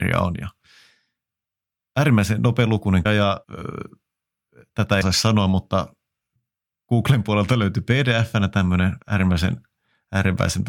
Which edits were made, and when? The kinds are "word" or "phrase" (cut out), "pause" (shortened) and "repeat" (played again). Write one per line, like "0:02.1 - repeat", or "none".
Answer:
0:03.1 - word
0:03.4 - pause
0:05.0 - phrase
0:06.4 - pause
0:09.0 - pause